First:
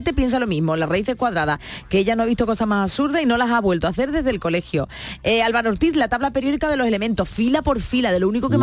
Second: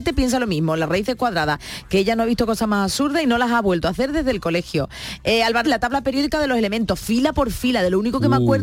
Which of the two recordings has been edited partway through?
second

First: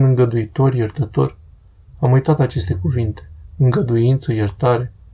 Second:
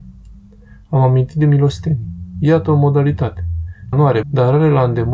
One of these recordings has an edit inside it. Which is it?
second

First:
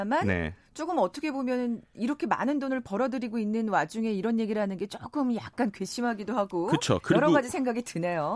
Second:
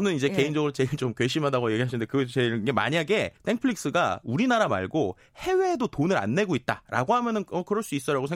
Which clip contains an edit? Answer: second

